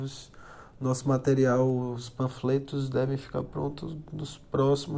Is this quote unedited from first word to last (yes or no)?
yes